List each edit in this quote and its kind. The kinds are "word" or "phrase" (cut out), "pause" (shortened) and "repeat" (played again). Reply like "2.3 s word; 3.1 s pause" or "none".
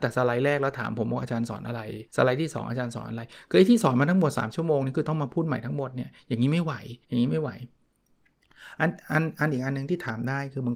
2.1 s pause; 7.0 s pause